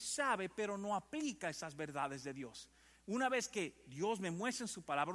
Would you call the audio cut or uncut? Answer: uncut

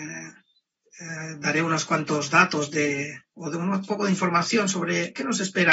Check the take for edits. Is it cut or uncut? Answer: uncut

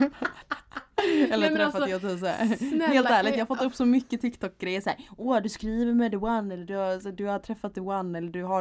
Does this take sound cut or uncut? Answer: uncut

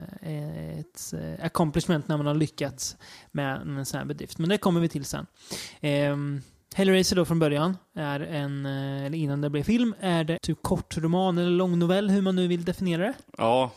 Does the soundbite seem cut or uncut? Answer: cut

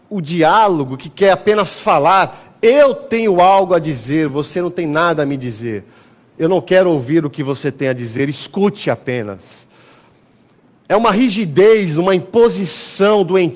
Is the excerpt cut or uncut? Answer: uncut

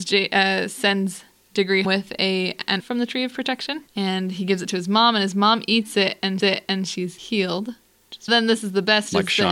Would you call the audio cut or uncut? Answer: cut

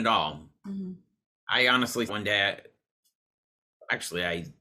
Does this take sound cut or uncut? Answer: cut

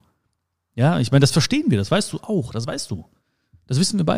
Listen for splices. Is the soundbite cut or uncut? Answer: uncut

